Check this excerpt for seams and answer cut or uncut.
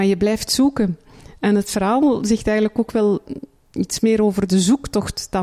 uncut